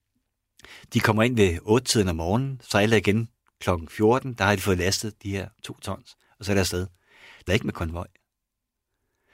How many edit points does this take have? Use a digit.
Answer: 1